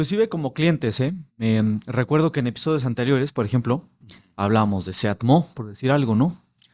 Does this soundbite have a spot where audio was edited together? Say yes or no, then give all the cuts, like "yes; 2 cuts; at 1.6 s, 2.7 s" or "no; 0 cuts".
yes; 1 cut; at 1.3 s